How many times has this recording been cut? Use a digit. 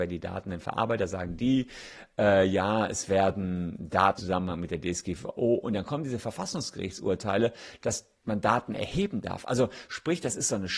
1